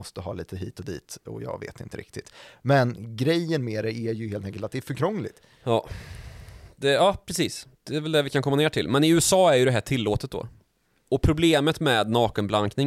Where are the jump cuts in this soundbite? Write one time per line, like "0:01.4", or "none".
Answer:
none